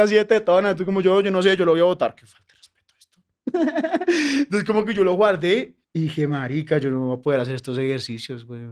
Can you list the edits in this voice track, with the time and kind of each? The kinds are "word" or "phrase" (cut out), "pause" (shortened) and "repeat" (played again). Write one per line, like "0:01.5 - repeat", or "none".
0:05.8 - pause